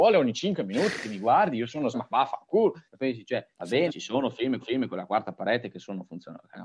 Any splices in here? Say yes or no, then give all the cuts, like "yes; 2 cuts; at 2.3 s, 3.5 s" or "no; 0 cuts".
yes; 5 cuts; at 1.9 s, 2.9 s, 3.5 s, 3.9 s, 4.6 s